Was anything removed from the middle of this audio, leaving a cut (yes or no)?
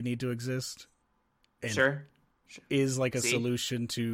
no